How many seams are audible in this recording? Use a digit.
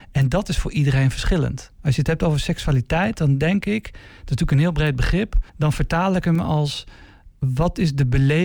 1